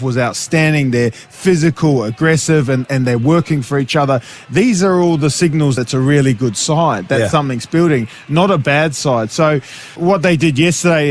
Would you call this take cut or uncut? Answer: cut